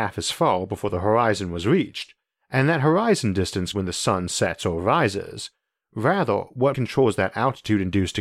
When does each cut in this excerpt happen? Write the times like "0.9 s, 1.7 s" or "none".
3.7 s, 6.7 s